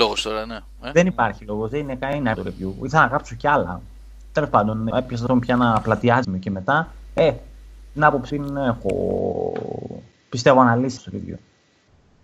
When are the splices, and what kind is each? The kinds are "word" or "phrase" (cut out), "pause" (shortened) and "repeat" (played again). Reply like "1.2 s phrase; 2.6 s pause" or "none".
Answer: 2.3 s word; 4.9 s word; 5.3 s word; 6.2 s word; 8.3 s word; 11.0 s word